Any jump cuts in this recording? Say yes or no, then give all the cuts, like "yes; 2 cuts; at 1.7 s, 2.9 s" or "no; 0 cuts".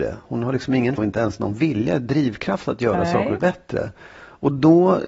yes; 2 cuts; at 1.0 s, 3.4 s